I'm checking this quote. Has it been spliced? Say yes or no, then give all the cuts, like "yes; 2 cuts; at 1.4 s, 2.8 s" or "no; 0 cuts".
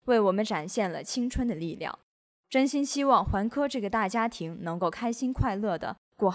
no; 0 cuts